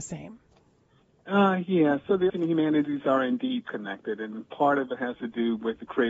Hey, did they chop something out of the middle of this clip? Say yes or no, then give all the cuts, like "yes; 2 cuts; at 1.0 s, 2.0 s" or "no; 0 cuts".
yes; 1 cut; at 2.3 s